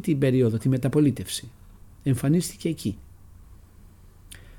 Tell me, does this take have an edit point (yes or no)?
yes